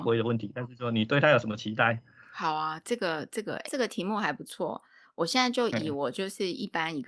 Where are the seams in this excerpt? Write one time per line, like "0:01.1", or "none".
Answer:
0:03.6